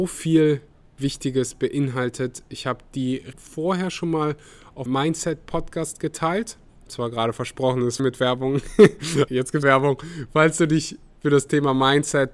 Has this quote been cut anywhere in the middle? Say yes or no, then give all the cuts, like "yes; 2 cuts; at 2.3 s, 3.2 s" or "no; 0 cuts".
yes; 6 cuts; at 3.3 s, 4.9 s, 6.9 s, 8.0 s, 9.3 s, 9.6 s